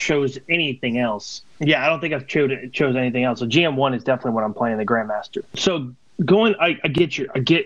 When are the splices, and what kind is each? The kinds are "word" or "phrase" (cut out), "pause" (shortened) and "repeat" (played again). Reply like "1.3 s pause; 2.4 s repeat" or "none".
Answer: none